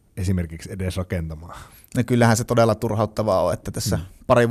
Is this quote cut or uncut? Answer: uncut